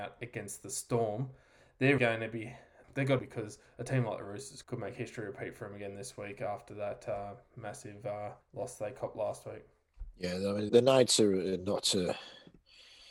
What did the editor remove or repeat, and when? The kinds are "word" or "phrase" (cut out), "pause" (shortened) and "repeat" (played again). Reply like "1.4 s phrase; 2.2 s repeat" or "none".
2.0 s word; 2.8 s word; 3.2 s phrase; 4.6 s word; 8.4 s pause; 10.1 s pause; 10.7 s word